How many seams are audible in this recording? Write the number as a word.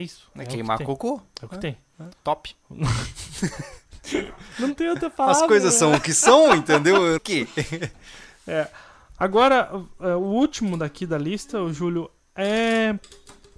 one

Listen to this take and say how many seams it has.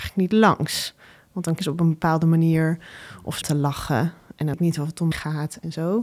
four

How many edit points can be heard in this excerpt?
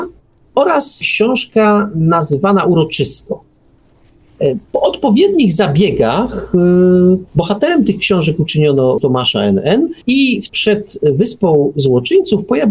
six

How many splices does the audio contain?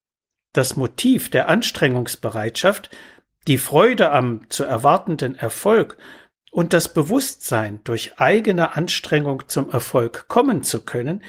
zero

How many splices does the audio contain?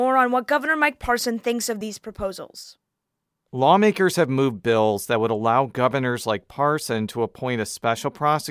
zero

